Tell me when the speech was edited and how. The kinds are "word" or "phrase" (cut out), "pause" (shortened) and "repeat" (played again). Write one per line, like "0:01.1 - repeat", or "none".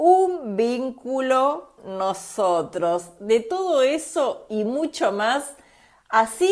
0:01.8 - word